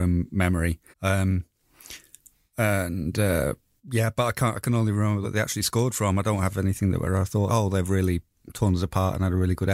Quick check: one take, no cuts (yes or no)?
no